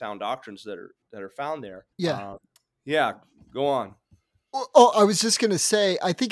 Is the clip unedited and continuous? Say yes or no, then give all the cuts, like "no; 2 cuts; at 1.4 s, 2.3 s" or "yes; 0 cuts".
no; 2 cuts; at 1.9 s, 2.6 s